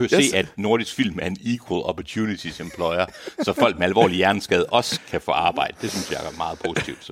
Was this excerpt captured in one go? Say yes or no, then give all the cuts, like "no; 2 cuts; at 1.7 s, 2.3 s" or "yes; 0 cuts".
yes; 0 cuts